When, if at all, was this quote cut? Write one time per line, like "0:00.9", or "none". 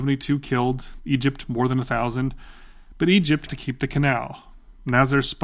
0:03.5